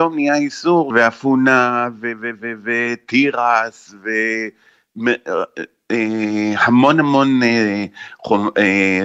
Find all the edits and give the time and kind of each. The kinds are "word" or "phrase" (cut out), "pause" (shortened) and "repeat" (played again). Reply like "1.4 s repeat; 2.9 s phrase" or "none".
0.9 s phrase

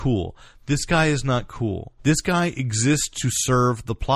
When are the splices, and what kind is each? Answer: 2.0 s pause

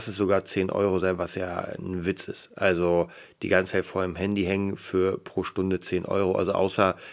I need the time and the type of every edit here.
none

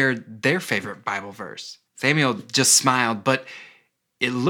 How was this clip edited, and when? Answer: 1.9 s pause

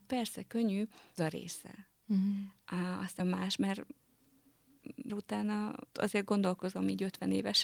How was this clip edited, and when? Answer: 1.2 s word; 3.2 s word; 5.1 s word; 5.9 s word

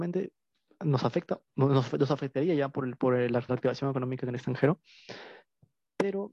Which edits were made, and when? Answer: 1.4 s pause; 3.5 s word

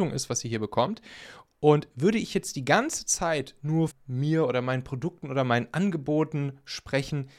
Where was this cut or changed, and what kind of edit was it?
3.9 s word

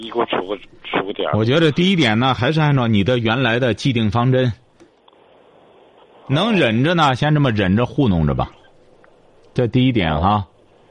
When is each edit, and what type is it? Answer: none

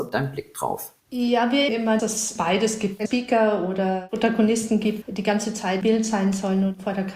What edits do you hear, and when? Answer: 1.0 s pause; 1.7 s word; 2.0 s word; 3.1 s word; 5.0 s word; 5.8 s word

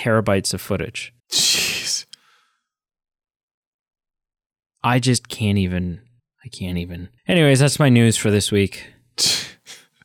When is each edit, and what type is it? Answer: 1.2 s pause; 6.2 s pause; 7.2 s pause

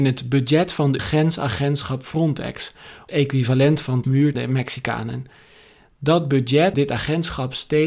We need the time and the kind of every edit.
1.0 s word; 3.1 s word; 4.0 s word; 4.3 s word; 6.7 s word

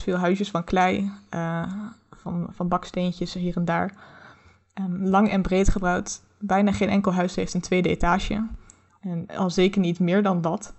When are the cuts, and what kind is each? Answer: none

